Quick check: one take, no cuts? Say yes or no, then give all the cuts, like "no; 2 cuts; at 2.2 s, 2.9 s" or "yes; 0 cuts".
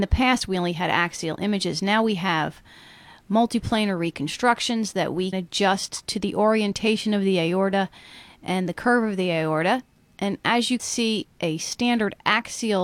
no; 2 cuts; at 5.3 s, 10.8 s